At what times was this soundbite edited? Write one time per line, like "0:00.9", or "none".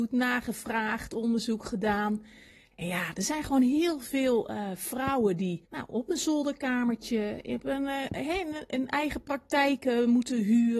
0:05.6

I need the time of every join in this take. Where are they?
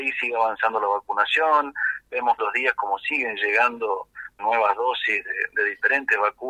0:02.4
0:04.4

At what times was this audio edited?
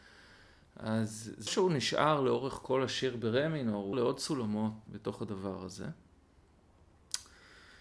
0:01.5
0:03.9
0:04.9

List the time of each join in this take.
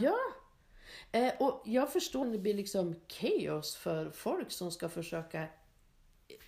0:02.2

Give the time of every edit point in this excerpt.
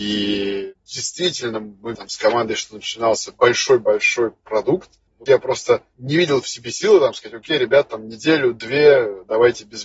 0:01.9
0:05.3

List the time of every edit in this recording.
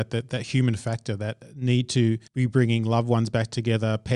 0:02.3

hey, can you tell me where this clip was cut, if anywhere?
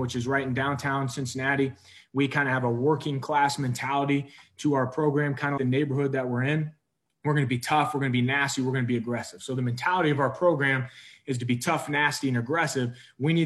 0:05.6

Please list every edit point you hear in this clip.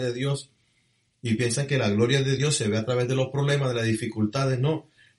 none

